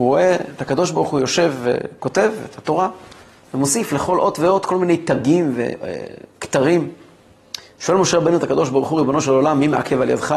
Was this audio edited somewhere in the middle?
no; 0 cuts

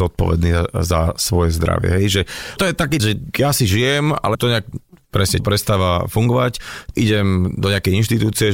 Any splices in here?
yes; 6 cuts; at 2.6 s, 3.0 s, 3.3 s, 4.3 s, 5.4 s, 6.9 s

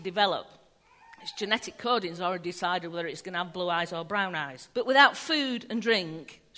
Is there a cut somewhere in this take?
yes; 1 cut; at 4.7 s

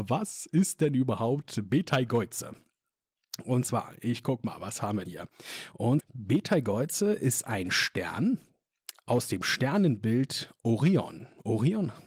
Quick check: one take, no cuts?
no; 2 cuts; at 5.0 s, 6.0 s

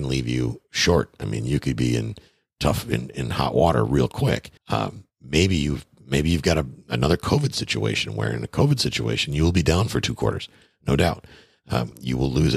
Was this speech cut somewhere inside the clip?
yes; 1 cut; at 4.6 s

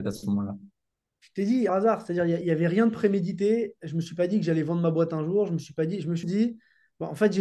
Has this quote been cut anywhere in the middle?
yes; 3 cuts; at 1.7 s, 2.4 s, 6.2 s

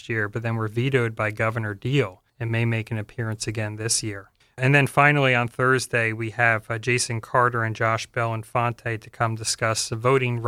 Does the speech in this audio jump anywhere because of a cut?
yes; 2 cuts; at 2.3 s, 4.4 s

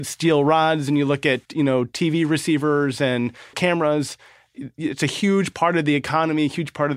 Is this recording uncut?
no; 2 cuts; at 1.4 s, 3.5 s

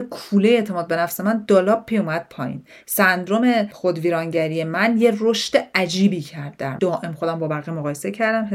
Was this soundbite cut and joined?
yes; 1 cut; at 6.8 s

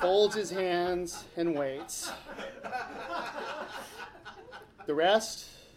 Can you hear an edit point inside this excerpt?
no; 0 cuts

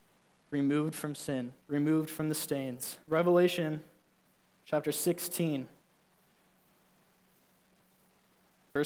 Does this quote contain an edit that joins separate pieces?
yes; 2 cuts; at 1.6 s, 3.0 s

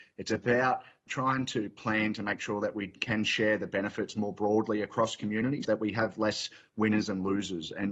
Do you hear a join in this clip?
yes; 1 cut; at 5.6 s

